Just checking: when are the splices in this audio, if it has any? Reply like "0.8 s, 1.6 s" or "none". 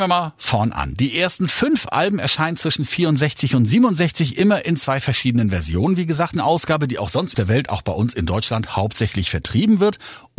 6.3 s, 7.3 s

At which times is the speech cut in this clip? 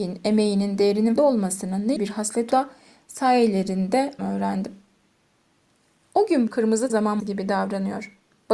1.2 s, 2.0 s, 2.5 s, 4.2 s, 6.5 s, 6.9 s, 7.2 s

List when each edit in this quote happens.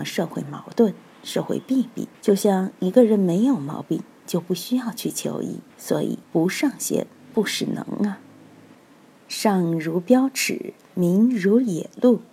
2.1 s, 5.7 s, 6.2 s

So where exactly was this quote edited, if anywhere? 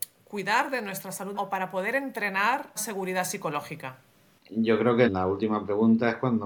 1.3 s, 2.8 s, 4.1 s, 5.1 s

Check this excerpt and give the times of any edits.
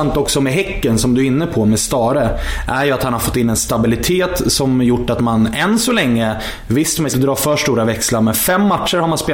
7.1 s

